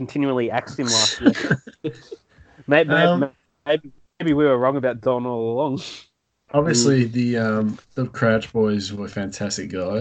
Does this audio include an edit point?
no; 0 cuts

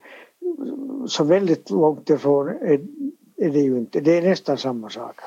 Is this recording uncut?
yes; 0 cuts

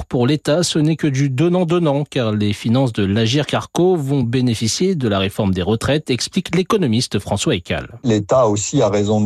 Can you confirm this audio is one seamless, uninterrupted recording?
yes; 0 cuts

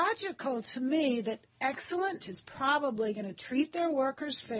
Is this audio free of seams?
no; 1 cut; at 2.2 s

